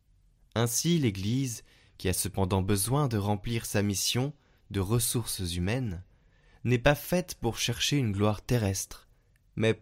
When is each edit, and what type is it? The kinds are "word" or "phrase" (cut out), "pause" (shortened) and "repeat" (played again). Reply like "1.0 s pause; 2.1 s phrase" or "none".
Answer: none